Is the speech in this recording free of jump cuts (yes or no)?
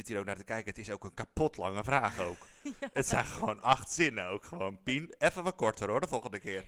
yes